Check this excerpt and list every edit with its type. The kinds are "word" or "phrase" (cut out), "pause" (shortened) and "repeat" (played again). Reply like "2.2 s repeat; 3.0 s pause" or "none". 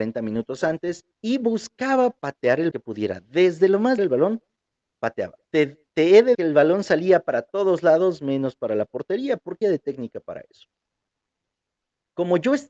1.1 s pause; 2.2 s pause; 2.7 s phrase; 4.0 s phrase; 5.4 s pause; 6.3 s word; 9.6 s word